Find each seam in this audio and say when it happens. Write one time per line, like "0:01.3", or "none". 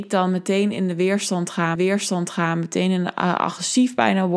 0:01.7